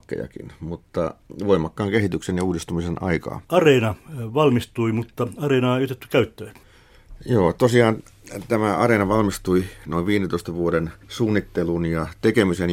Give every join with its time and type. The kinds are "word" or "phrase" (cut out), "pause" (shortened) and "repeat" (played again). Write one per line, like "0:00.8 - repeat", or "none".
0:03.4 - pause
0:11.0 - pause